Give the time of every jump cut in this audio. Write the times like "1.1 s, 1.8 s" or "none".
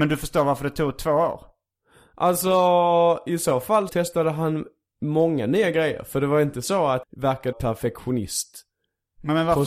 3.9 s, 7.0 s, 7.5 s